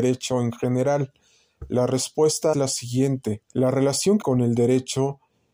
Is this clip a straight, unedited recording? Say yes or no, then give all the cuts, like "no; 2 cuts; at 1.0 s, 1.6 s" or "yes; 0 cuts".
no; 3 cuts; at 2.5 s, 3.5 s, 4.2 s